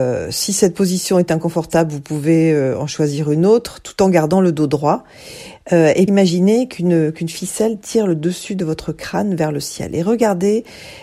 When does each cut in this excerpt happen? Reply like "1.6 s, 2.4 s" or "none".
6.1 s